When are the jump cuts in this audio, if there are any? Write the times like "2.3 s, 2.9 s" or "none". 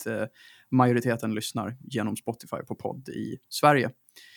none